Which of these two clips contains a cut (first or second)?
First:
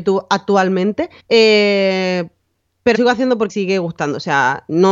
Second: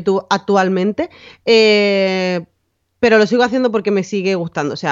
first